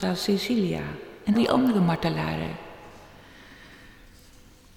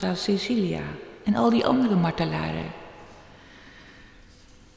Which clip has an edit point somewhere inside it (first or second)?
first